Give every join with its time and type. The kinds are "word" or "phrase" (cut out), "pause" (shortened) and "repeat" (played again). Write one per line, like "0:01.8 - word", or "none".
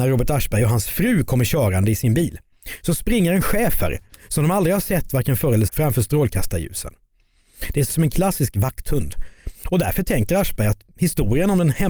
0:05.7 - word
0:07.9 - word